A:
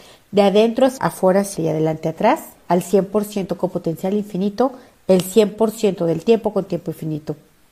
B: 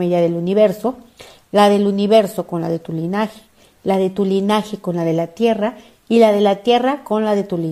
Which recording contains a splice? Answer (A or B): A